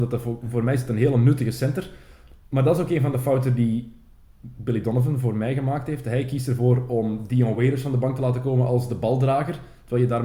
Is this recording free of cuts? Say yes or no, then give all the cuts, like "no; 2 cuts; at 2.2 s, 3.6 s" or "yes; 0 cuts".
yes; 0 cuts